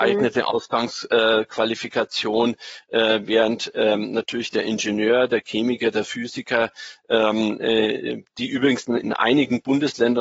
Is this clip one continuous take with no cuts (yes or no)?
yes